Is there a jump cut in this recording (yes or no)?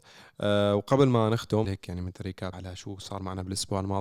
yes